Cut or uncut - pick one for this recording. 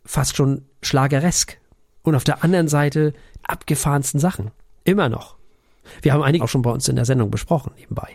cut